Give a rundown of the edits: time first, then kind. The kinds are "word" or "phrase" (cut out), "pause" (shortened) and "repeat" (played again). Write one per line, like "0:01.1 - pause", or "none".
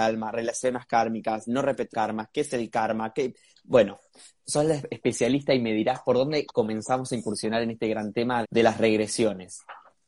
0:01.9 - word
0:04.5 - word
0:08.4 - word